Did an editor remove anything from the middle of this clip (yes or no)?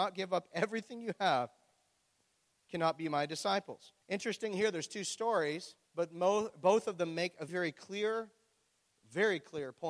yes